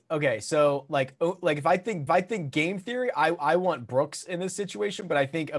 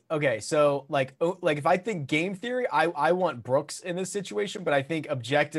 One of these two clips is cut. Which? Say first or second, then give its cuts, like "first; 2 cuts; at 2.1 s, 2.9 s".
first; 1 cut; at 2.1 s